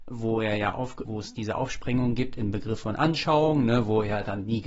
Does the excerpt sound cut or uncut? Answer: cut